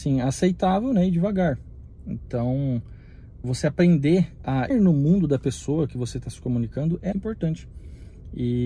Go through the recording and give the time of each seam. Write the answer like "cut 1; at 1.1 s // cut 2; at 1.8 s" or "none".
cut 1; at 3.4 s // cut 2; at 4.7 s // cut 3; at 7.1 s